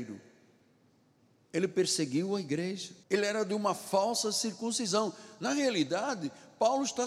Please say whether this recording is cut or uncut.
cut